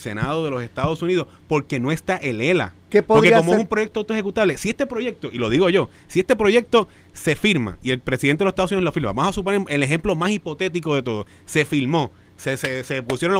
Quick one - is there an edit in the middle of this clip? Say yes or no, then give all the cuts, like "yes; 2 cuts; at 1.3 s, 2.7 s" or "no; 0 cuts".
no; 0 cuts